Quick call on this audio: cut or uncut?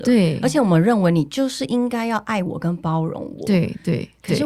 uncut